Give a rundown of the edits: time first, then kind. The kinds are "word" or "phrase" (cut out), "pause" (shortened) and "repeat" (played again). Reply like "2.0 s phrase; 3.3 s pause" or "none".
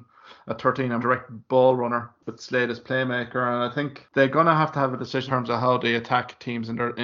1.0 s word; 5.3 s word